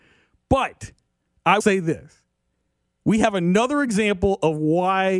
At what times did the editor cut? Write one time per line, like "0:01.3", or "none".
0:01.6